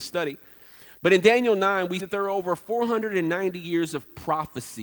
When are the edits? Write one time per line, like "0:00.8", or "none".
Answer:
0:02.0